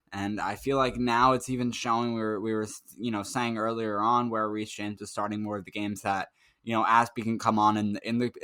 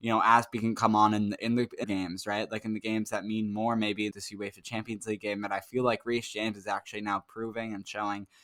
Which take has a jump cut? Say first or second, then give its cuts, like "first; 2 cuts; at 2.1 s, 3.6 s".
second; 2 cuts; at 1.8 s, 4.1 s